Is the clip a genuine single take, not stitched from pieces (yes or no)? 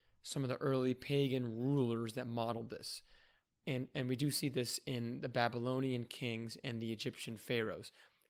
yes